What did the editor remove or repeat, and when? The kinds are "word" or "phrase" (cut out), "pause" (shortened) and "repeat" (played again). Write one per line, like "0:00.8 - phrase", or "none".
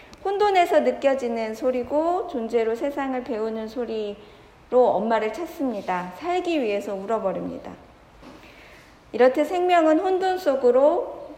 none